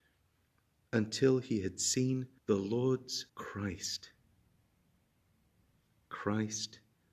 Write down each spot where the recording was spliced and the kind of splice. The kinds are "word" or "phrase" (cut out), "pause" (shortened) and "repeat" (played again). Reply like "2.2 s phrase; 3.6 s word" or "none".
2.4 s pause; 3.3 s pause